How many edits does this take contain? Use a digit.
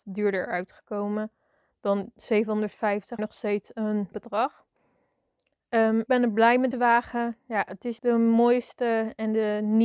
5